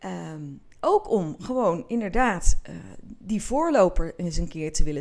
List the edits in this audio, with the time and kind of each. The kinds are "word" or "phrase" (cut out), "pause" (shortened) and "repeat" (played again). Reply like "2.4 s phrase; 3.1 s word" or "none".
none